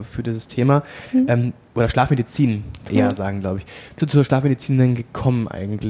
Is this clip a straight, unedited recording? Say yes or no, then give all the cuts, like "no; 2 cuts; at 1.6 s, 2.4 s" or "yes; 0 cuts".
no; 2 cuts; at 2.9 s, 4.0 s